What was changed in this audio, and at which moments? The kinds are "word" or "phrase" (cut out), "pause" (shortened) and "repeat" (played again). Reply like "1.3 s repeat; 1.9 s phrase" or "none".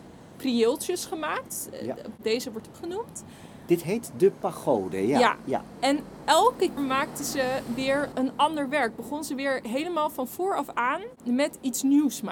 2.7 s word; 6.8 s word; 8.1 s word